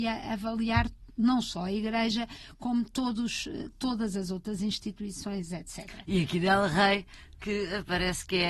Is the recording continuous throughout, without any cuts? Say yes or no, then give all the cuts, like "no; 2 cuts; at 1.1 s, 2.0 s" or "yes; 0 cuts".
yes; 0 cuts